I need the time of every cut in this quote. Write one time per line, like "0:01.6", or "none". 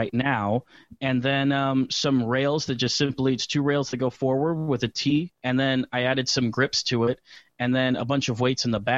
0:05.4